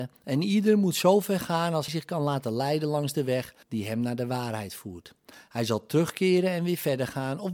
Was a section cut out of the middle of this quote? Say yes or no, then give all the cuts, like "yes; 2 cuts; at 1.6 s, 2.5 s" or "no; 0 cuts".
yes; 2 cuts; at 1.9 s, 3.6 s